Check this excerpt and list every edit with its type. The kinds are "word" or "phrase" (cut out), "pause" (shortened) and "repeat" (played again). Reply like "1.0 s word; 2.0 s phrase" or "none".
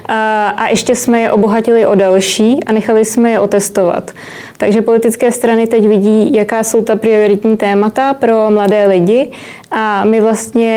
none